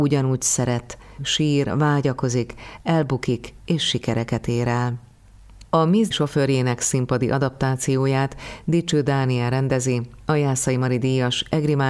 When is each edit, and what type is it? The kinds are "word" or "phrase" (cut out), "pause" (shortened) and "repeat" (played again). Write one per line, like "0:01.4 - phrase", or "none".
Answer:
0:01.2 - phrase
0:06.1 - word